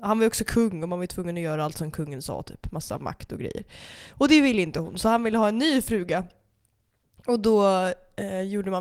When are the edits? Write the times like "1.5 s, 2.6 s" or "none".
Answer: none